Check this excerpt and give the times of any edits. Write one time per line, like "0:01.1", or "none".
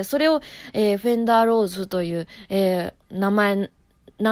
0:03.0

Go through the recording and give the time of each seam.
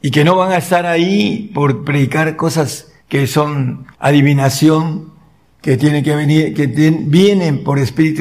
0:03.0
0:03.9

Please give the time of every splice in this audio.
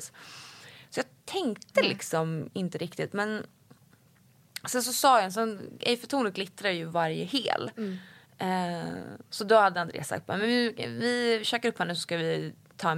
none

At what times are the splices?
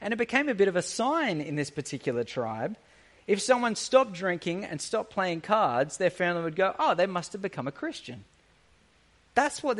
none

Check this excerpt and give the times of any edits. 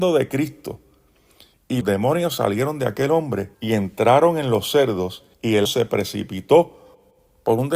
0:01.8
0:03.5
0:05.3
0:05.7

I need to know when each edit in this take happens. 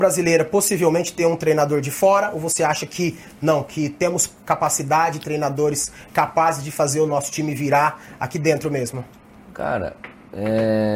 none

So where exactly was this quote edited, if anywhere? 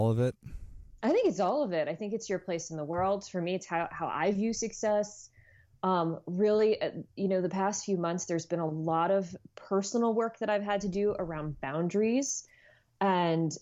none

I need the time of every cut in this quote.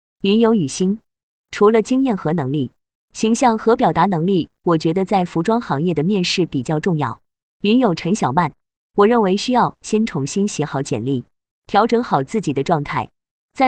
none

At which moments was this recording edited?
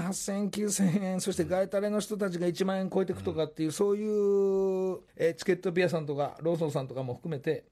0:05.1

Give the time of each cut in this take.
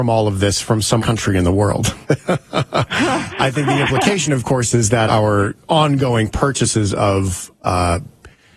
0:01.0
0:02.0
0:05.1

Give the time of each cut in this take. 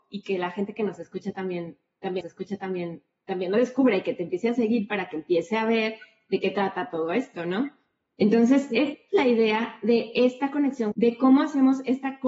0:02.2
0:10.9

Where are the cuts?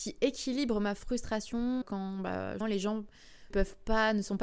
0:01.8
0:02.6
0:03.5

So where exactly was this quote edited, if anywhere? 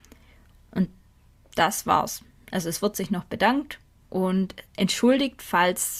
none

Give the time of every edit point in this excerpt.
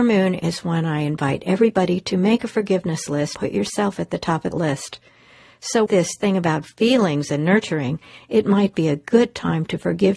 0:03.3
0:04.5
0:05.9

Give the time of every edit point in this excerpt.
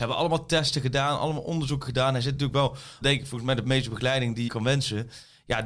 0:03.0
0:03.6
0:04.5

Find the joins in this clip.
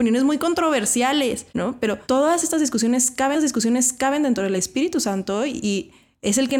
0:01.5
0:02.0
0:03.3
0:04.6

